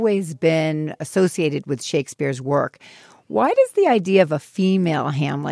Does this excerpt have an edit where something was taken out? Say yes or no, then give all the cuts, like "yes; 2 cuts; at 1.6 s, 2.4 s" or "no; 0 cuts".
no; 0 cuts